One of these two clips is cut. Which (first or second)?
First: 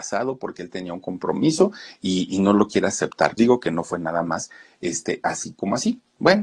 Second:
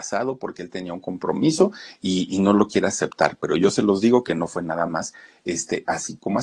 first